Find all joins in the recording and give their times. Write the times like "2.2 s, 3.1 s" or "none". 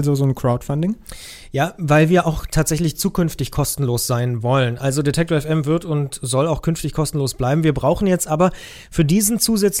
none